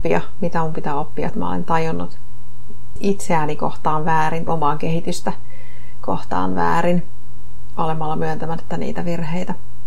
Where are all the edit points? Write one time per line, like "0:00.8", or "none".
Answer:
0:01.3
0:03.0
0:04.5